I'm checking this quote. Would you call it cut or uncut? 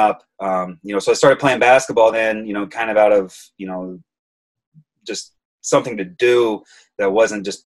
uncut